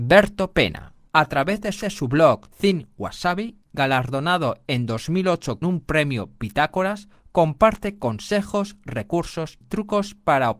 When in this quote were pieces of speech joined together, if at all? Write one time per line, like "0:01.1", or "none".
0:01.8
0:05.6
0:09.6